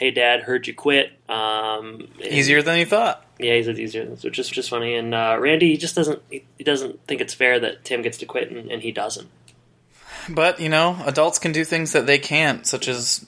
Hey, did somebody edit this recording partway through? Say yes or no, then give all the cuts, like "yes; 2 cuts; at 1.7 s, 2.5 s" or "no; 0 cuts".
yes; 2 cuts; at 1.2 s, 4.5 s